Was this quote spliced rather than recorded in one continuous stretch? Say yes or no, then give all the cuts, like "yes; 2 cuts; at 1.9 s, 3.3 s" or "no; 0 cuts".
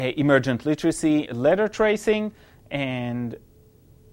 yes; 1 cut; at 1.3 s